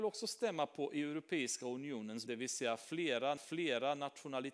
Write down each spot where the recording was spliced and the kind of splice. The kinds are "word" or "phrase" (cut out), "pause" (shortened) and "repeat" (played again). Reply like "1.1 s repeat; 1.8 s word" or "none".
2.3 s word; 3.4 s repeat